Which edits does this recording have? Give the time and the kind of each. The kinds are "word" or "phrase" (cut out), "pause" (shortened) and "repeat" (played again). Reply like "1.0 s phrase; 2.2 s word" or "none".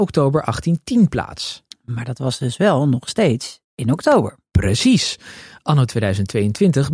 3.6 s pause